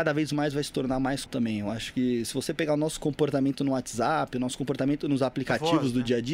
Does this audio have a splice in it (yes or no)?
yes